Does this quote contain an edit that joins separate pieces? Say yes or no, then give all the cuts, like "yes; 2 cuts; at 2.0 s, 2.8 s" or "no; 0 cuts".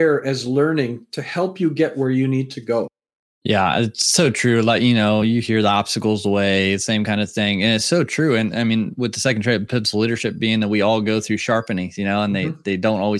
no; 0 cuts